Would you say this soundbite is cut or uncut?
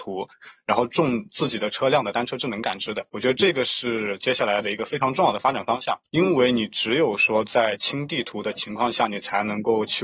cut